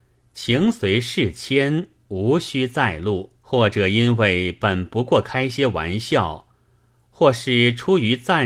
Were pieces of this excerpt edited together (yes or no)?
yes